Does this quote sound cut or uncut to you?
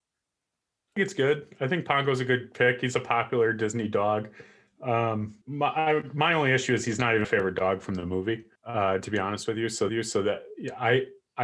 cut